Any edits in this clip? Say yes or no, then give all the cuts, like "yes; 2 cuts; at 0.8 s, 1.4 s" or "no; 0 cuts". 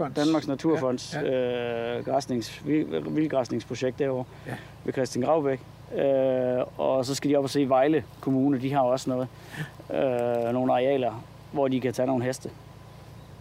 no; 0 cuts